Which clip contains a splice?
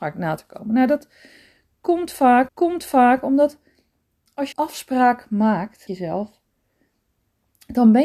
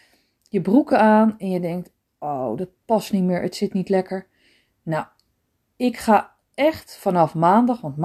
first; 3 cuts; at 2.5 s, 4.5 s, 5.9 s

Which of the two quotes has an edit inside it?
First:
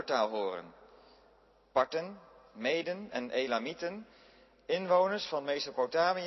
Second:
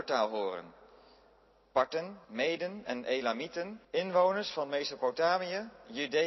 second; 2 cuts; at 2.2 s, 3.8 s

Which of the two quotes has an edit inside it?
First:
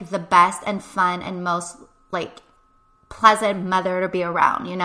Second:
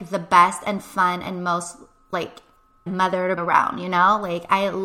second; 2 cuts; at 2.9 s, 3.4 s

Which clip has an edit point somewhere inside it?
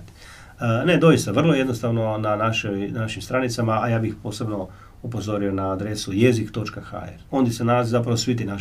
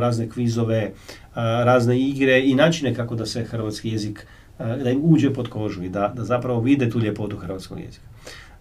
first; 1 cut; at 7.3 s

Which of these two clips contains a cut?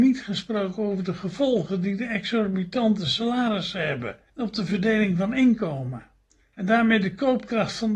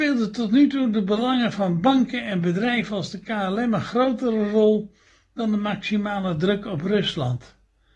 first; 1 cut; at 4.3 s

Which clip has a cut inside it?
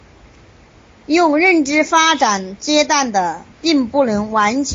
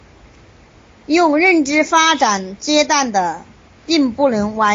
first; 1 cut; at 3.5 s

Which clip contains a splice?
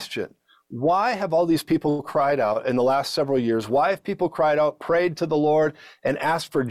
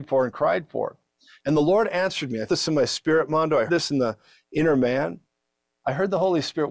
second; 2 cuts; at 2.5 s, 3.7 s

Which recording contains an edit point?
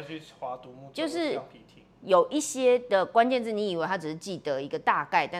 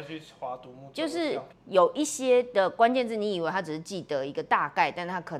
second; 1 cut; at 1.5 s

